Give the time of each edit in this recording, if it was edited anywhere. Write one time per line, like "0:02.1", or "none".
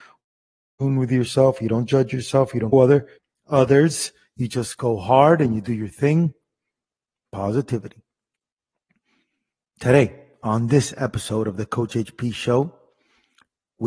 0:02.7
0:03.2